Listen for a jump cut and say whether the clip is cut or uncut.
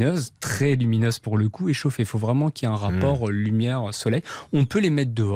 uncut